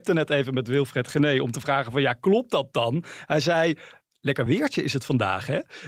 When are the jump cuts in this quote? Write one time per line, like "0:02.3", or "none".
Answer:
none